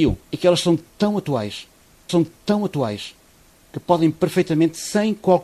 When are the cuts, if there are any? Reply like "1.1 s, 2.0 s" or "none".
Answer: 2.1 s